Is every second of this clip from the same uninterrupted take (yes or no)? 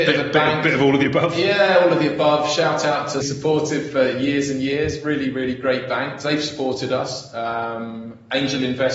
no